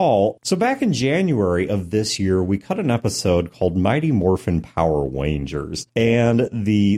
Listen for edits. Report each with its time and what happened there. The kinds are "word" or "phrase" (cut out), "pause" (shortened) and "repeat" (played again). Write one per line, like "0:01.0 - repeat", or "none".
none